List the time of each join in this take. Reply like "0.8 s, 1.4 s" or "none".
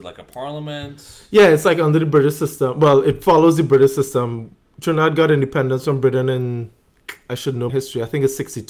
7.7 s